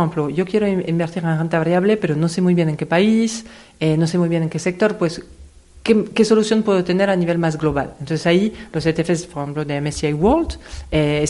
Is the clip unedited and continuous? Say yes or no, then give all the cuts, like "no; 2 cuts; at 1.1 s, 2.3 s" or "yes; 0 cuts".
yes; 0 cuts